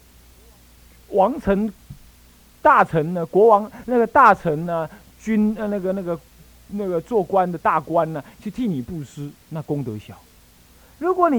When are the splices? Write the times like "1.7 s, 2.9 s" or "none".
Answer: none